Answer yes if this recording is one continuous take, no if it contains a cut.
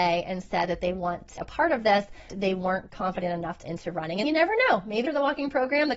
no